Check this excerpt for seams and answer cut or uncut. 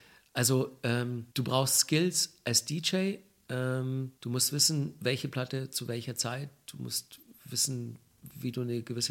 cut